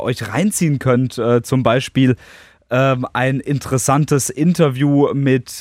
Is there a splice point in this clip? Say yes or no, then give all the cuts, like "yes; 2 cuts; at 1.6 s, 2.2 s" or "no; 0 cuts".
no; 0 cuts